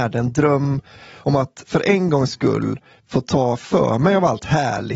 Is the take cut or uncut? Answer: uncut